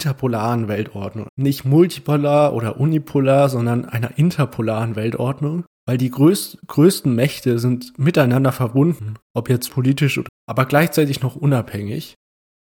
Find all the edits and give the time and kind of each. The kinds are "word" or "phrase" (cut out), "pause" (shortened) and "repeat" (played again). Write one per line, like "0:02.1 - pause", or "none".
0:01.3 - word
0:05.7 - pause
0:09.2 - pause
0:09.7 - word
0:10.3 - word